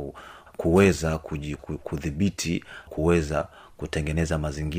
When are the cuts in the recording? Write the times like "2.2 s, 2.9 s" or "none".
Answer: 1.6 s, 2.9 s